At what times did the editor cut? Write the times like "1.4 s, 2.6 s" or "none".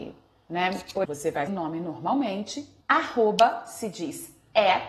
1.0 s, 1.5 s, 2.8 s

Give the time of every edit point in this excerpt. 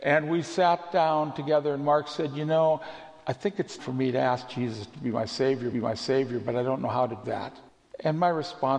3.8 s, 5.7 s, 7.2 s, 7.7 s

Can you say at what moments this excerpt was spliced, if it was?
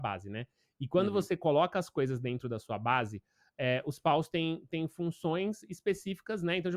none

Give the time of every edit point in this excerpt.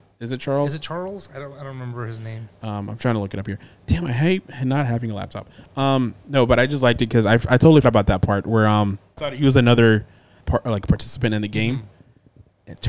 7.8 s, 9.2 s, 10.4 s

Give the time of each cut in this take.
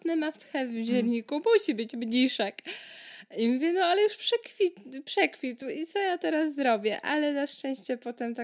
none

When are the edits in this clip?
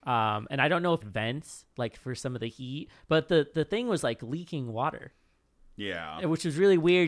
1.0 s

